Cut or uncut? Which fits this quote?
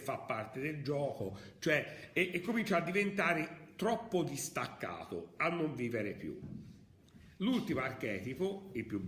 uncut